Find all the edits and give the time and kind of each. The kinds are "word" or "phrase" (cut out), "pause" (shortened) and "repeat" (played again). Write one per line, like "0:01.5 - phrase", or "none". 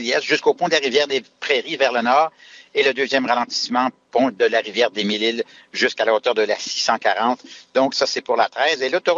none